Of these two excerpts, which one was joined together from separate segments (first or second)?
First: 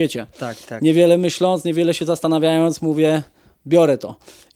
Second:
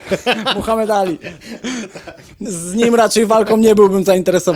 second